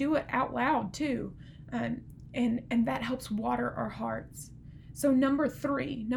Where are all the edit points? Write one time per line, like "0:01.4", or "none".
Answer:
none